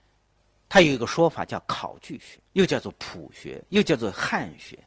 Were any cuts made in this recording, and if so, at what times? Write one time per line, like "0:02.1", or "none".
0:02.5